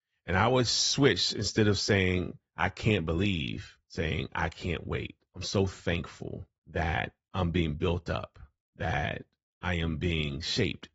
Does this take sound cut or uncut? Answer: cut